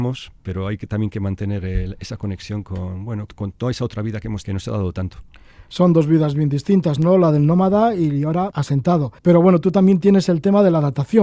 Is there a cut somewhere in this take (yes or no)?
yes